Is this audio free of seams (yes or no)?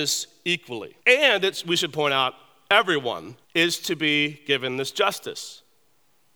no